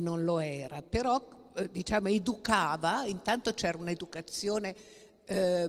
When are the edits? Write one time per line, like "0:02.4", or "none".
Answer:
none